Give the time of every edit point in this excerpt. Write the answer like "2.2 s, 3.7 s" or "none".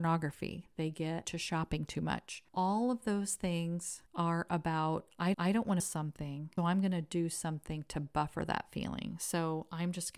1.2 s, 2.5 s, 4.1 s, 5.3 s, 5.8 s, 6.6 s